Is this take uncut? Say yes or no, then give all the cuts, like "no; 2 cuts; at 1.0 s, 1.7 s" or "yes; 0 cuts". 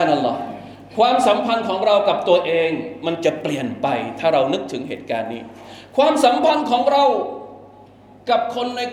yes; 0 cuts